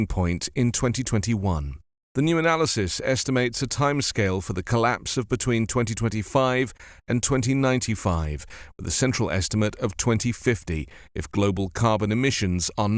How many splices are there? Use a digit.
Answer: 0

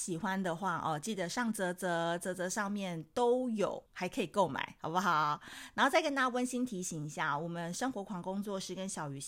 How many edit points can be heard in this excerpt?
1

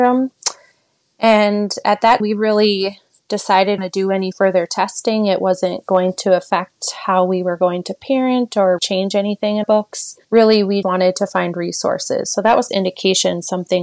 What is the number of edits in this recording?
7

